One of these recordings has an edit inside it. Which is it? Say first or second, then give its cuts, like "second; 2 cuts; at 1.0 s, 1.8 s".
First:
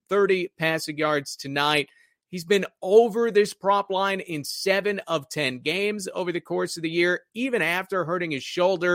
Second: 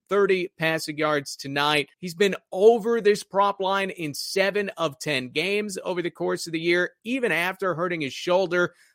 second; 1 cut; at 1.9 s